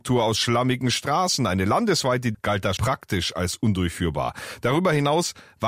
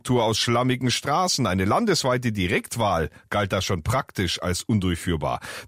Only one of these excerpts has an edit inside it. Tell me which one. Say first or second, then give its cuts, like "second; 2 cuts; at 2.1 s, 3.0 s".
first; 2 cuts; at 2.3 s, 2.8 s